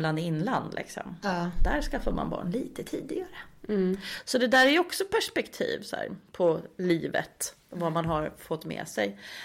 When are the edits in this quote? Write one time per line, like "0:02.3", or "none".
0:06.3